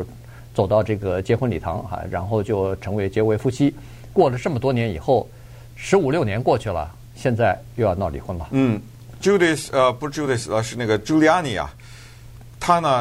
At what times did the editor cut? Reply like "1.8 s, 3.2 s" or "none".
none